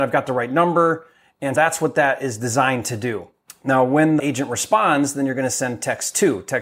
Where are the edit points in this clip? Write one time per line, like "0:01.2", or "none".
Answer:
0:01.5
0:04.2